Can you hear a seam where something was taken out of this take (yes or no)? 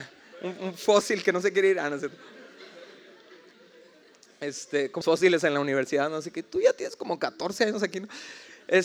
yes